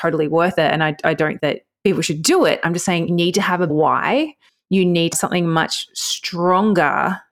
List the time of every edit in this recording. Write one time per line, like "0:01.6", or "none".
0:01.4
0:03.1
0:03.7
0:05.1